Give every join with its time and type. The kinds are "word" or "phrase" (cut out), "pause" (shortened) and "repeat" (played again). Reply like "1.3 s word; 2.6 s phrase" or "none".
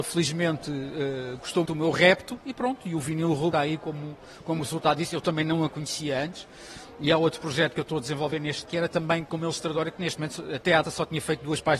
1.6 s word; 3.5 s word; 8.6 s word; 10.8 s word